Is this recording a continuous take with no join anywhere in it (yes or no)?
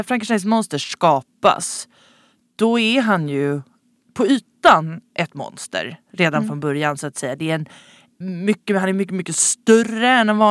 no